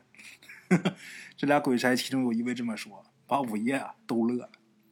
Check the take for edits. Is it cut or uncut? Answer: cut